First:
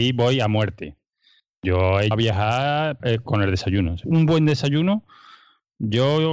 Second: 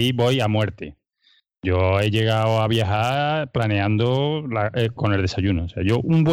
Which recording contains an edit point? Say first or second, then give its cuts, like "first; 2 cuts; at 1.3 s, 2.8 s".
first; 3 cuts; at 2.1 s, 3.0 s, 4.0 s